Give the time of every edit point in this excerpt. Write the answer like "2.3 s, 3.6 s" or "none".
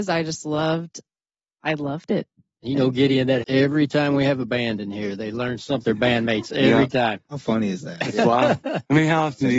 3.4 s, 5.8 s